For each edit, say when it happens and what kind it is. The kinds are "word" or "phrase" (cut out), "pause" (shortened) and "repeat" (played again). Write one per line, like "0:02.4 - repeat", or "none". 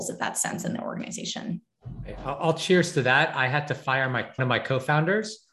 0:04.4 - word